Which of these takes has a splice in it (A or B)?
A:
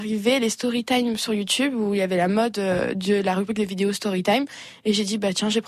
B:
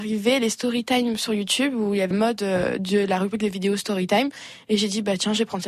B